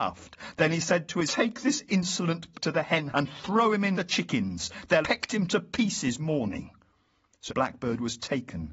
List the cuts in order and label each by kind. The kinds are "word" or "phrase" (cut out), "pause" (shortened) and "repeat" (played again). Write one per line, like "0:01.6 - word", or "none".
0:01.3 - word
0:02.5 - word
0:03.1 - word
0:03.9 - word
0:05.0 - word
0:06.2 - word
0:07.5 - word